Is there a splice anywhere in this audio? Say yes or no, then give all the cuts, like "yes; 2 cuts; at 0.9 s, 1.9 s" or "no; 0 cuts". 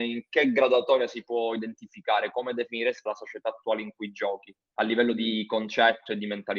yes; 1 cut; at 3.1 s